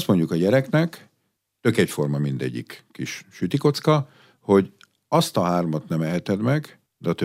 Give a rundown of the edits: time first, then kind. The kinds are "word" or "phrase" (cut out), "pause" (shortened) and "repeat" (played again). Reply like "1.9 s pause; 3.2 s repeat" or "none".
none